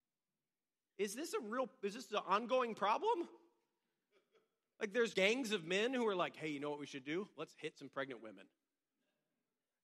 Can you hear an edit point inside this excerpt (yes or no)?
yes